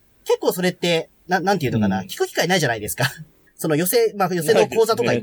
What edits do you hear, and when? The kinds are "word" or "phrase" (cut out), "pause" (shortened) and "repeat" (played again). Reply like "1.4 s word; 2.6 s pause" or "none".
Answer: 3.5 s pause